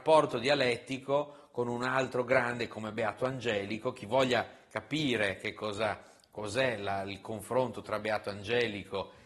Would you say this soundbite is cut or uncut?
uncut